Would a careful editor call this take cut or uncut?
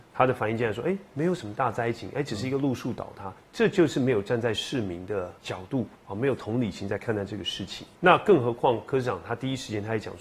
cut